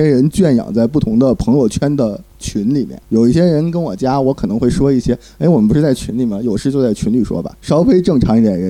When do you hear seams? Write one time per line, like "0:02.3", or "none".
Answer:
0:02.3
0:03.0
0:07.6